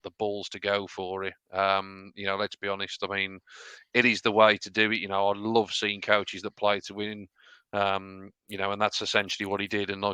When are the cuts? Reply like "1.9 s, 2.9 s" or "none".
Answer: none